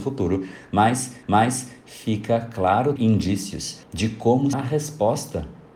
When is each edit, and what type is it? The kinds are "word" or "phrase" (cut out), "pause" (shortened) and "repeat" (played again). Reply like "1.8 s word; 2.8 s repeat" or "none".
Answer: 1.2 s repeat; 3.0 s word; 3.8 s pause; 4.5 s word